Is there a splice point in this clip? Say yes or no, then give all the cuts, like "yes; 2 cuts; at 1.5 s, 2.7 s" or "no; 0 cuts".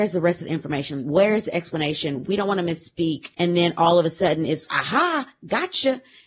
yes; 1 cut; at 4.7 s